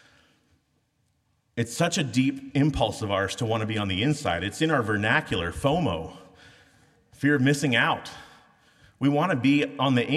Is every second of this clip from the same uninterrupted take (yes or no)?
yes